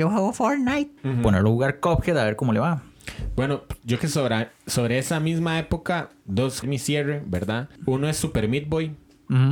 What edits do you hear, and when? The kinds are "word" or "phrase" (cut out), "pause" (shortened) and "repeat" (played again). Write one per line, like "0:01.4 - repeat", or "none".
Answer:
0:01.0 - pause
0:04.0 - word
0:06.6 - phrase
0:07.8 - pause